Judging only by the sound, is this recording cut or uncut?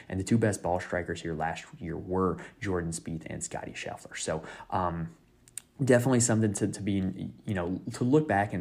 uncut